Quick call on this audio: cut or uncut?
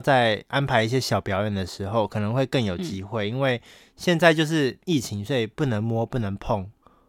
uncut